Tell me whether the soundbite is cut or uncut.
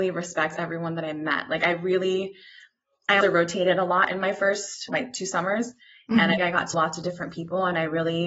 cut